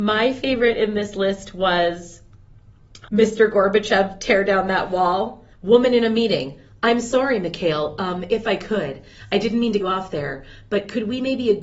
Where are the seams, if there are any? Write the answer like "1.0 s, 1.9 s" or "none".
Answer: 3.1 s, 5.5 s, 9.8 s